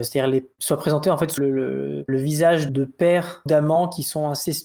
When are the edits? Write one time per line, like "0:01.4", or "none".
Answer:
0:01.4
0:02.1
0:02.7
0:03.5